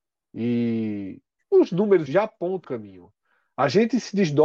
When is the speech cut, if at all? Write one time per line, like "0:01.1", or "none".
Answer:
0:01.4
0:02.1
0:02.6